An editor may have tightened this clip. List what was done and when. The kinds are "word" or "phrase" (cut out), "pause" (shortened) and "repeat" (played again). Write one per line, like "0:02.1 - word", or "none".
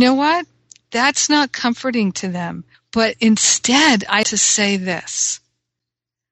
0:02.7 - pause
0:04.2 - word